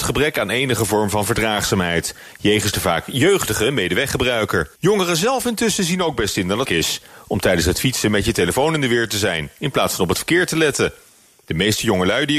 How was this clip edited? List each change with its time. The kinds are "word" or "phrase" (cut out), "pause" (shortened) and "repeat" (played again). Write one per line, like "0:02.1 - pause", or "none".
0:04.8 - pause
0:06.6 - word